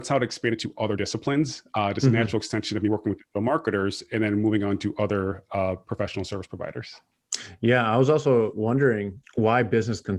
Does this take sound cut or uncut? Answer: cut